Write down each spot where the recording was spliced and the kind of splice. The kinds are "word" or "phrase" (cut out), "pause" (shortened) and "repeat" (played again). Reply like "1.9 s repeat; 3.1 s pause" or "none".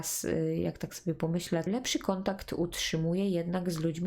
1.7 s word

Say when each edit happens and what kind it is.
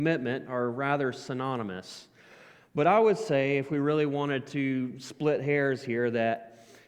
none

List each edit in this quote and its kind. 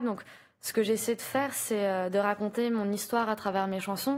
none

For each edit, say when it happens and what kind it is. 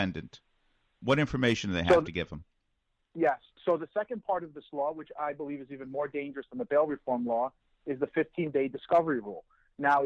none

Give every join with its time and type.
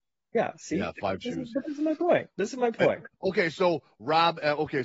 1.2 s word; 3.1 s phrase

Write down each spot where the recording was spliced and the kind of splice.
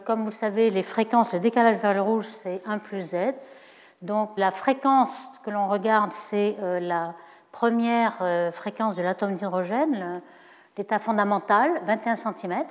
4.4 s word

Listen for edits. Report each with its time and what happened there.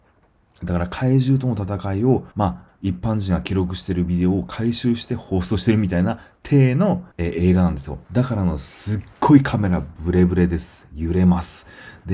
2.3 s pause; 7.1 s pause; 8.1 s pause

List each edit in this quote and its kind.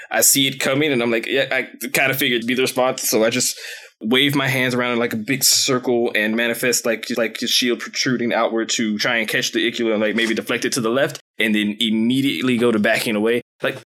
2.4 s word; 7.1 s repeat

